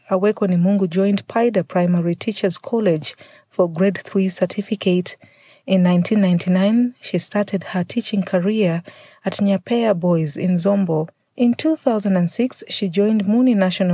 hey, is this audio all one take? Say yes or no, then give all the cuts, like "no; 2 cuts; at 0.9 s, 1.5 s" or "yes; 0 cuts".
yes; 0 cuts